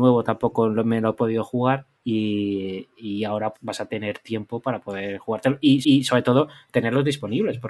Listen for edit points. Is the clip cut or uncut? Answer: cut